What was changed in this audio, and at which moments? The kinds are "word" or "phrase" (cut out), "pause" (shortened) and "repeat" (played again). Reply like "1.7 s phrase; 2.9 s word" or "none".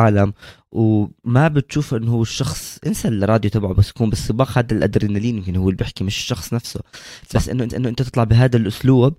7.7 s repeat